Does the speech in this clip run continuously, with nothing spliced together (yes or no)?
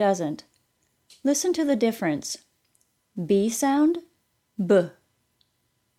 yes